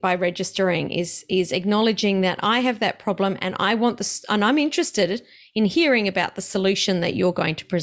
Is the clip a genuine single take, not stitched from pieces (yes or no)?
yes